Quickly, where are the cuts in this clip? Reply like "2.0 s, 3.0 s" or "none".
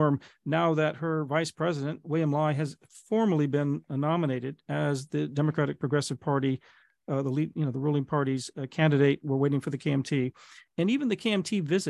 none

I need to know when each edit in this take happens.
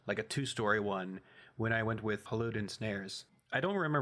2.3 s

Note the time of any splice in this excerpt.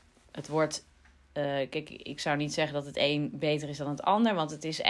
none

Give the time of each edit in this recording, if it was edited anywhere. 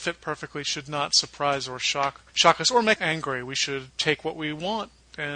2.3 s, 3.0 s, 3.9 s

